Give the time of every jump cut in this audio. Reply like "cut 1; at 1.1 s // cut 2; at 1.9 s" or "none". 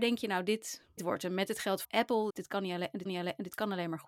cut 1; at 1.0 s // cut 2; at 1.8 s // cut 3; at 2.3 s // cut 4; at 3.1 s